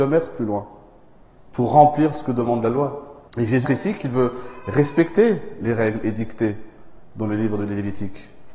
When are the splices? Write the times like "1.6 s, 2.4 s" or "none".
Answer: 3.3 s, 3.6 s